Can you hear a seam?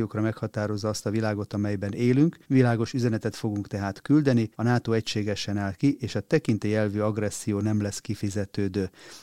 yes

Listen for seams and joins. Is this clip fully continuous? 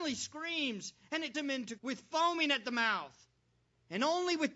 no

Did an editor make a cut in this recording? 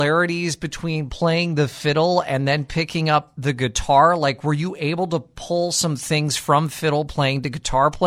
no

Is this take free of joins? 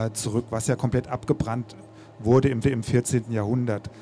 no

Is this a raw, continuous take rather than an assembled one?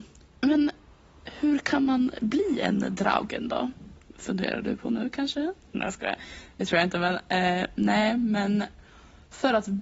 yes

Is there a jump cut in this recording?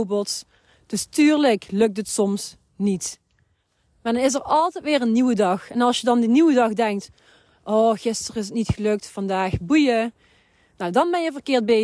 no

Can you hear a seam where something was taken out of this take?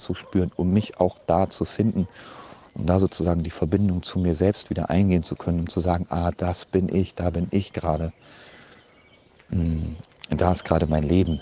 no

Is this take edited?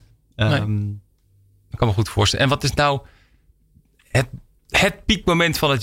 no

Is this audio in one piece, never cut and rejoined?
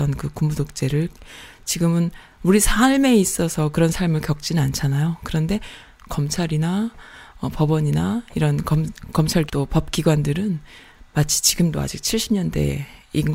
no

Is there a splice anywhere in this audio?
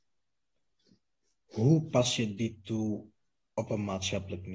no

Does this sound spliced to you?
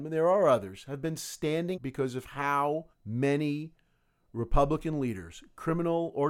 yes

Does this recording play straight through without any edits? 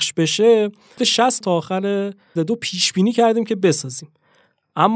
no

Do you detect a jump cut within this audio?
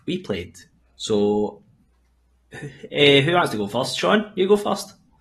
no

